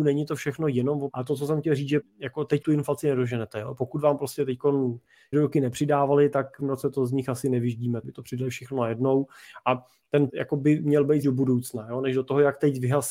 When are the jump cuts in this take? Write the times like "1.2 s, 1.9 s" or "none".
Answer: 1.1 s, 2.0 s, 2.6 s, 5.3 s, 6.6 s, 8.0 s, 10.3 s, 11.2 s